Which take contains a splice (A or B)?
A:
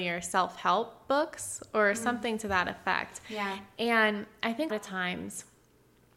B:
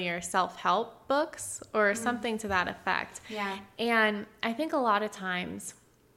A